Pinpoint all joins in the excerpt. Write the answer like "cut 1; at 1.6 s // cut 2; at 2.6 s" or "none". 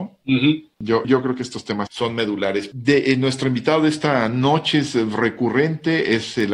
cut 1; at 1.0 s // cut 2; at 1.9 s